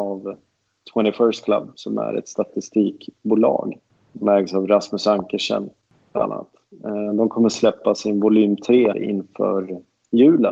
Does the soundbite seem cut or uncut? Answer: cut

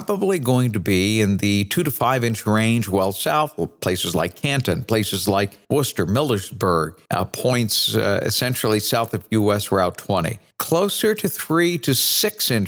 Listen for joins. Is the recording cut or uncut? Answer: cut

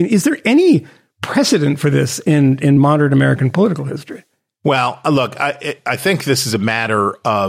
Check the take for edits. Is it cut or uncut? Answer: uncut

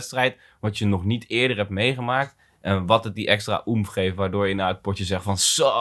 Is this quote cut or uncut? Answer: uncut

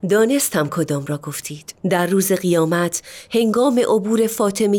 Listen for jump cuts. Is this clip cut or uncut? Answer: cut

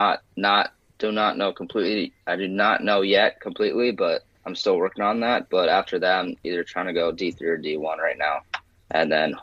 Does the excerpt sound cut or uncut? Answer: cut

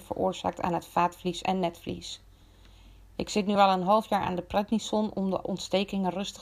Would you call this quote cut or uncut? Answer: uncut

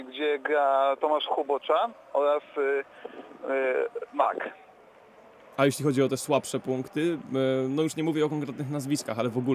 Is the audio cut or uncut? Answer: uncut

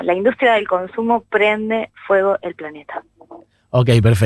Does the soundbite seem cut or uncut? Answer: uncut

